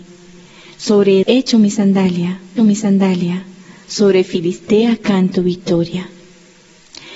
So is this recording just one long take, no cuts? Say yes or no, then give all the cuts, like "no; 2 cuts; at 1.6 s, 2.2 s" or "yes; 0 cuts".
no; 2 cuts; at 1.2 s, 2.6 s